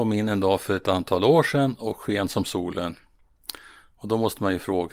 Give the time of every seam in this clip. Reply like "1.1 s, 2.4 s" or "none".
none